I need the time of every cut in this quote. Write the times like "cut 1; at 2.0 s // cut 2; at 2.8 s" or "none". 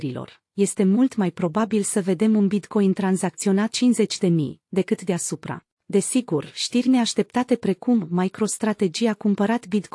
cut 1; at 3.7 s // cut 2; at 5.7 s